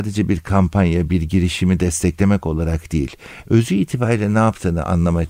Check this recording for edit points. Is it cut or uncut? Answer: uncut